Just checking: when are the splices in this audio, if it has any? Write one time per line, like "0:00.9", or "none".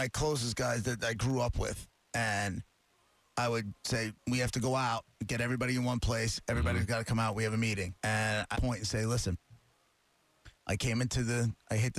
0:04.2
0:08.0
0:08.5
0:10.6